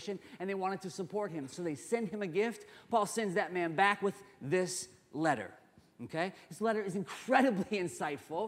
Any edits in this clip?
no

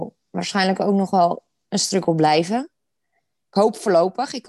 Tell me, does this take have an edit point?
no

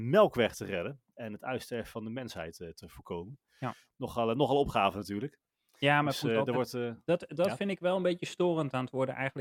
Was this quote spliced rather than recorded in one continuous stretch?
no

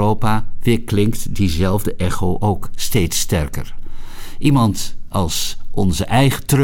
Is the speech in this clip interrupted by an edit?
no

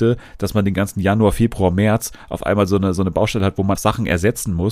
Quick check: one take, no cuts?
no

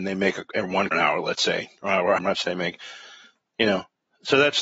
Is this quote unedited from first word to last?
no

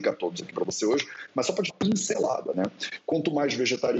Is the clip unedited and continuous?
no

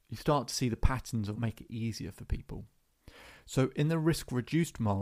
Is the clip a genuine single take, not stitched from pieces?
no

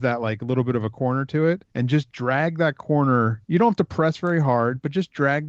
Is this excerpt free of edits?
no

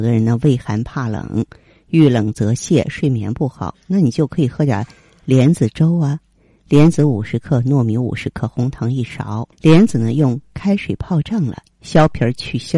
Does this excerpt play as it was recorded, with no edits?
no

